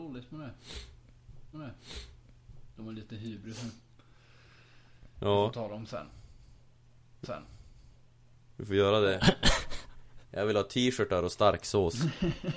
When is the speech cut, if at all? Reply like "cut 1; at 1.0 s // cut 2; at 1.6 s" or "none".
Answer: cut 1; at 1.5 s // cut 2; at 7.2 s